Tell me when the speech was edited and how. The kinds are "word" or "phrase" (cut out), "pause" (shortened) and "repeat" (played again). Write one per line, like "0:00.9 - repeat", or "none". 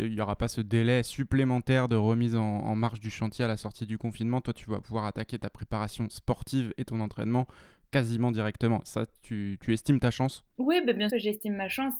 0:10.5 - pause
0:11.1 - word